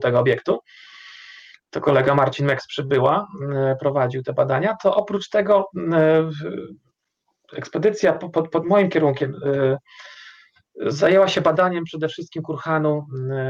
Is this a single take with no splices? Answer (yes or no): yes